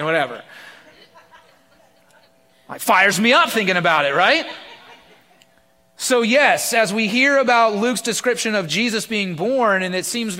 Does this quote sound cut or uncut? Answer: uncut